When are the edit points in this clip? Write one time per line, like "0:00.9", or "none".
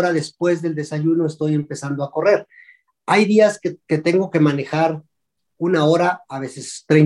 0:03.8